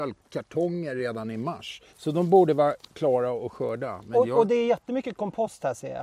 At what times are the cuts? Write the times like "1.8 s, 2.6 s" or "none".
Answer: 1.9 s